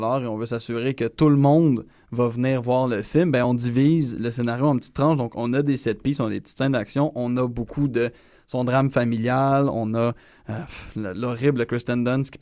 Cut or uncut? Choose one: uncut